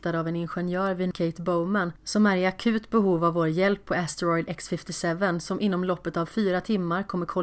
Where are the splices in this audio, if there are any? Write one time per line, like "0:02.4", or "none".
0:01.1